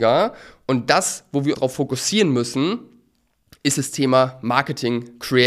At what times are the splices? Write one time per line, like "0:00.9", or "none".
0:01.5

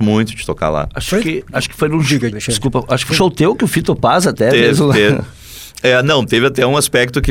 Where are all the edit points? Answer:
0:02.3
0:03.1

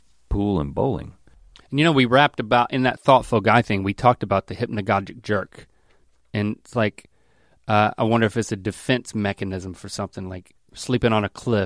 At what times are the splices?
none

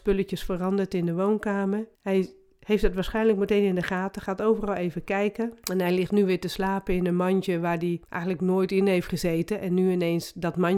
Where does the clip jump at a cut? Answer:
0:01.9
0:05.6
0:08.0

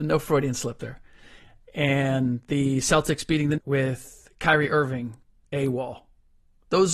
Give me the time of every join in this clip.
0:03.6

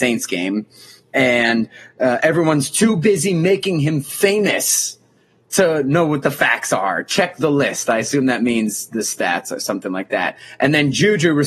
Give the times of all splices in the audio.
none

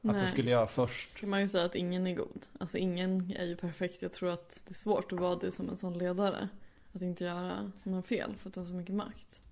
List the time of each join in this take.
none

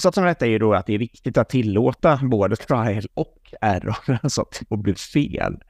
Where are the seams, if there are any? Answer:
none

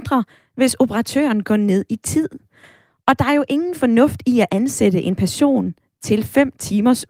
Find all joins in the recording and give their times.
none

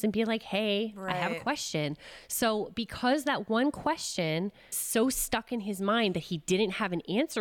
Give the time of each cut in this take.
0:04.7

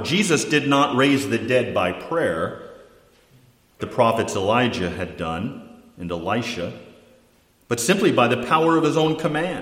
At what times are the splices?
0:03.8

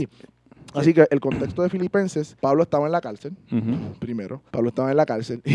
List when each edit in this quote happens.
0:02.4
0:04.5

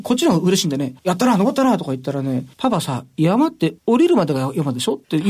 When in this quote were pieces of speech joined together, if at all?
0:01.0
0:02.5
0:03.8

